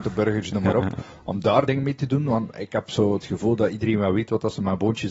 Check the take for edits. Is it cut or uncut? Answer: cut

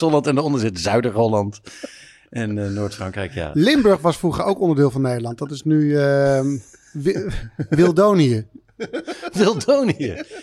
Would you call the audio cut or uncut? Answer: uncut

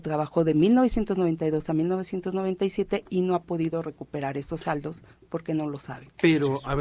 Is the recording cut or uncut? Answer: uncut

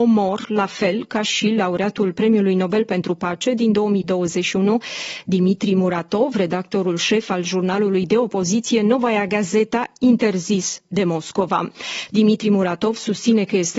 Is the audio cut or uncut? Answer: uncut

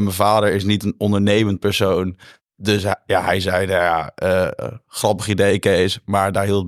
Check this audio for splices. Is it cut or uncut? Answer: uncut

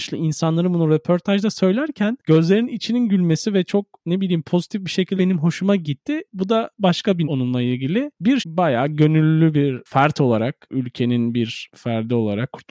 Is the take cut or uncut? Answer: cut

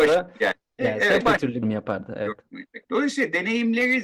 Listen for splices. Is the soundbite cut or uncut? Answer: cut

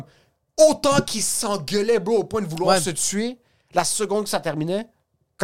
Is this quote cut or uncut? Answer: uncut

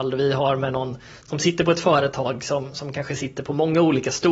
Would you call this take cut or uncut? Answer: uncut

